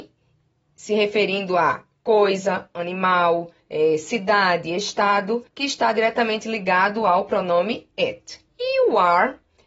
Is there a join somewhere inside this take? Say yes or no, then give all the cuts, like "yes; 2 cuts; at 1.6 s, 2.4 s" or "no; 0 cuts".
yes; 3 cuts; at 3.6 s, 5.5 s, 8.5 s